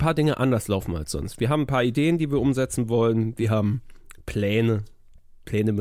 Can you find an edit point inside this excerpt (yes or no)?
no